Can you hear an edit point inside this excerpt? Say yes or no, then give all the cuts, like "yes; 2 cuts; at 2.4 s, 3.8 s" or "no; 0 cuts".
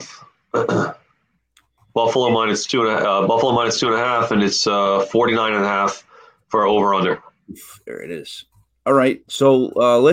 no; 0 cuts